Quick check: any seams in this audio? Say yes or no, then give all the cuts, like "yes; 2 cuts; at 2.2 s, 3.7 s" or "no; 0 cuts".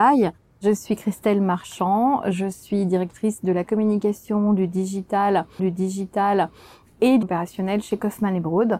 yes; 2 cuts; at 5.6 s, 7.2 s